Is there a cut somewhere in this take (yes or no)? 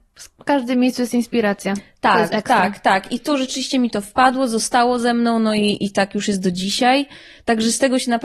no